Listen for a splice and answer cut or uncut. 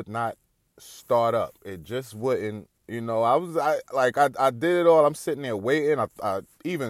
cut